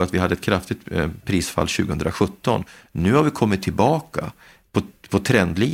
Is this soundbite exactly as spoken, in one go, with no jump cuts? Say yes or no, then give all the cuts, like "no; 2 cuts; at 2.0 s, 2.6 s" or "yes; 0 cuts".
yes; 0 cuts